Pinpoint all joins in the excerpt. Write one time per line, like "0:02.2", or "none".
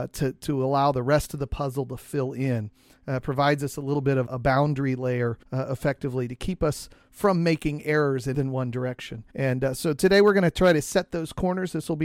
0:04.3
0:05.4
0:08.3
0:09.3